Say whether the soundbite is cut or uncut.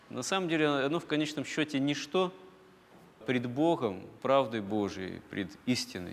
cut